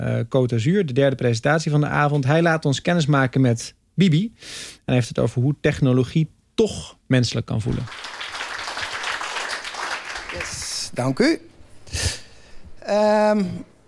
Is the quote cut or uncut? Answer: uncut